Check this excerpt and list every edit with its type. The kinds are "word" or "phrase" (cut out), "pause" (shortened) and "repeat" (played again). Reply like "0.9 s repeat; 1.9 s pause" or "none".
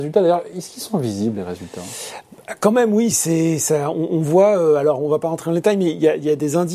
3.1 s word